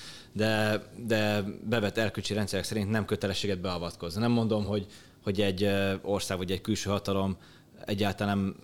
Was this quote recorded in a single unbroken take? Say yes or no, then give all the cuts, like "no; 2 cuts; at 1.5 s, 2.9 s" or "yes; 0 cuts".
yes; 0 cuts